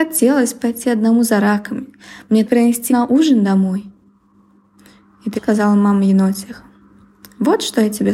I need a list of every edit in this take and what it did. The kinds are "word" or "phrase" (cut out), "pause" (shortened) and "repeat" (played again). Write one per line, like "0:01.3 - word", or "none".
0:02.5 - phrase
0:02.9 - word
0:05.4 - word